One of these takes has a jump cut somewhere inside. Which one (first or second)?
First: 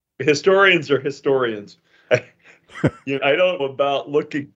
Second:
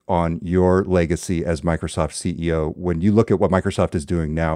first